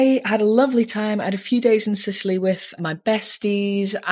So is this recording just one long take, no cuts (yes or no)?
no